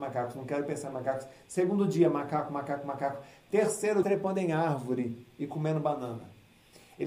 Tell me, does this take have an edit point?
yes; 1 cut; at 4.0 s

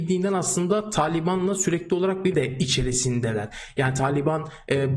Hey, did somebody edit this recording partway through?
yes; 1 cut; at 2.3 s

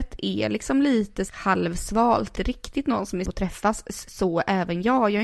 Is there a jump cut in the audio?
yes; 3 cuts; at 1.3 s, 2.4 s, 3.3 s

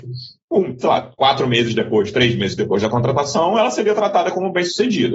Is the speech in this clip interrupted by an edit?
no; 0 cuts

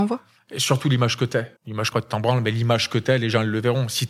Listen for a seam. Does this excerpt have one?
yes; 2 cuts; at 1.6 s, 1.9 s

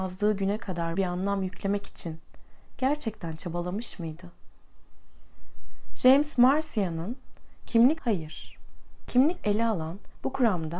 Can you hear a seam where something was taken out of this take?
yes; 3 cuts; at 0.9 s, 8.0 s, 9.4 s

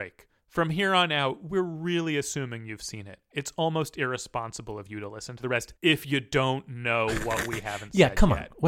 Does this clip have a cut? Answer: no; 0 cuts

